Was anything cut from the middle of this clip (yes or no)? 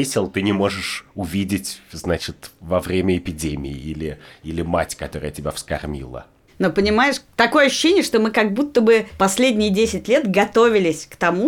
no